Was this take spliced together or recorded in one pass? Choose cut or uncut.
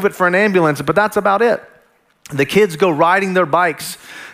uncut